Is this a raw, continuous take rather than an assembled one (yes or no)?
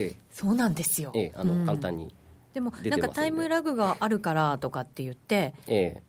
yes